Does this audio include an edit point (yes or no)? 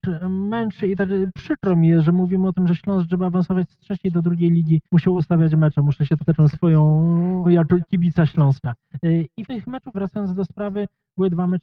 yes